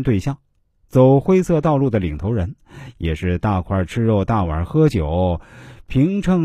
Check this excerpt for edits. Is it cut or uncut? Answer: uncut